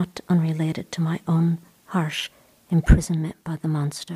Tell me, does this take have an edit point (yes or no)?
no